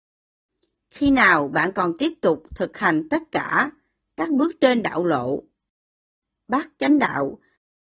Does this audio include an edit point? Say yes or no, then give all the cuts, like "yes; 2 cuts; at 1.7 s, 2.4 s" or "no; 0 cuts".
no; 0 cuts